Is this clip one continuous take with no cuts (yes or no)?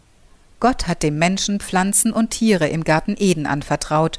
yes